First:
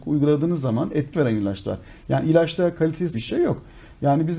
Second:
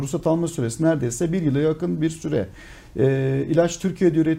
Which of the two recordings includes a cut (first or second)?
first